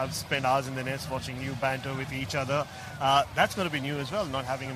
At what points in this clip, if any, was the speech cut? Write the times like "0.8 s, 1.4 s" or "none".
none